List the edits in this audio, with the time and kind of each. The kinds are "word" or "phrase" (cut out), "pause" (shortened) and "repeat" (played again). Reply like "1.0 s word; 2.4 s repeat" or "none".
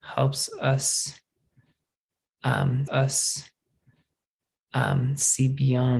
2.9 s repeat